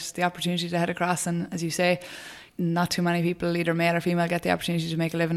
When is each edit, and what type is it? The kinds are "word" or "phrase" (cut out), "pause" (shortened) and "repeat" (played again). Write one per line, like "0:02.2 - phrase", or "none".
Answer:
0:02.5 - pause